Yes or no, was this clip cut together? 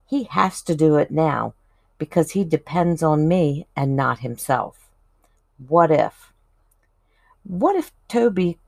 no